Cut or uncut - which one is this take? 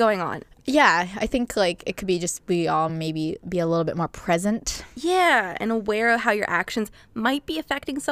uncut